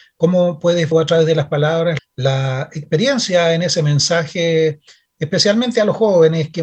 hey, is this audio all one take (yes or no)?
no